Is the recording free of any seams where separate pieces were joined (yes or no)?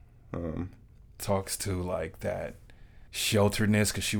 no